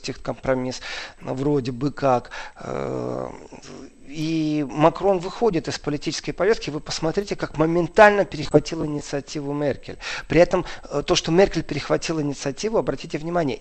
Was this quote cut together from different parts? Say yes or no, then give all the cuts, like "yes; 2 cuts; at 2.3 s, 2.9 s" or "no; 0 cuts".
no; 0 cuts